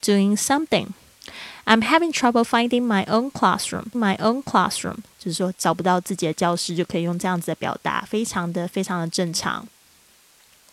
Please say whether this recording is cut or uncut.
cut